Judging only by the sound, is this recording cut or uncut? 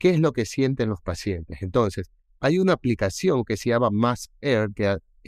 uncut